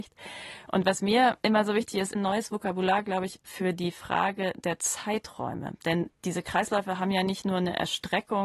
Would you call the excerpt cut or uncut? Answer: cut